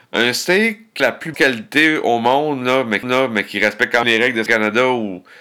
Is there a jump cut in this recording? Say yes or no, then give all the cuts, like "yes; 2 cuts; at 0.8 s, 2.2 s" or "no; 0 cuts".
yes; 5 cuts; at 1.0 s, 1.3 s, 3.0 s, 4.0 s, 4.5 s